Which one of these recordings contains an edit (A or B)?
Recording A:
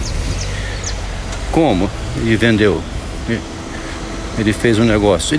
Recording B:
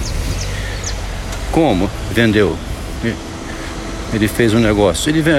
B